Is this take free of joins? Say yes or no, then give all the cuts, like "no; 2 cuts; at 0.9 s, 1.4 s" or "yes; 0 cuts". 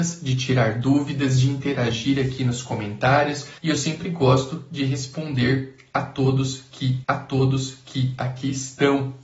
no; 2 cuts; at 3.6 s, 7.0 s